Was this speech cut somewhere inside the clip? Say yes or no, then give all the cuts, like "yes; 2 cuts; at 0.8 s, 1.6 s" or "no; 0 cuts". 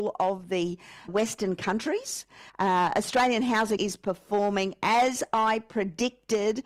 yes; 3 cuts; at 1.1 s, 2.5 s, 3.8 s